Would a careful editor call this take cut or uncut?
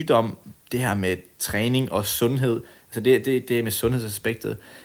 uncut